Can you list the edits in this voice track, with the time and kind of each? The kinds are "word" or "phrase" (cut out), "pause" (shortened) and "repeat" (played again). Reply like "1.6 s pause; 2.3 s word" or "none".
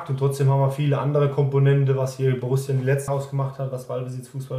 3.1 s word